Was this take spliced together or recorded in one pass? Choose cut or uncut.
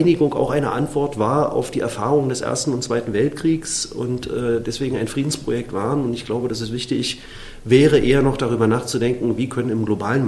uncut